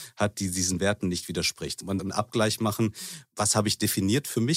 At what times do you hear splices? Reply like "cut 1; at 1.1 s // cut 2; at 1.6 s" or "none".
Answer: cut 1; at 2.0 s